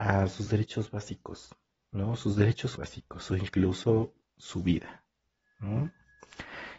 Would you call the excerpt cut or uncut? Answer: cut